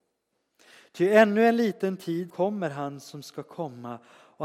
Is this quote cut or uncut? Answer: cut